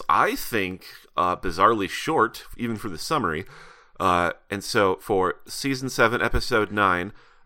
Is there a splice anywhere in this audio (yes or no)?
no